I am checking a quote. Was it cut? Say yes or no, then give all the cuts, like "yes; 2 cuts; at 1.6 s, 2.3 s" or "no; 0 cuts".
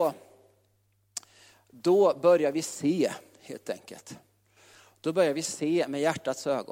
no; 0 cuts